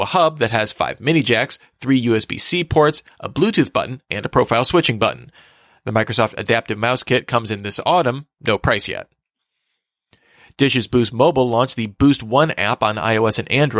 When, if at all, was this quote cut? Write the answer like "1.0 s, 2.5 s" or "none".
none